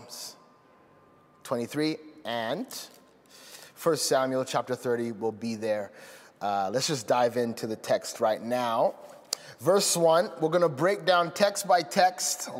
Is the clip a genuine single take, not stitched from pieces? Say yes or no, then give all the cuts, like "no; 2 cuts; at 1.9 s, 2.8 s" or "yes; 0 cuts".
yes; 0 cuts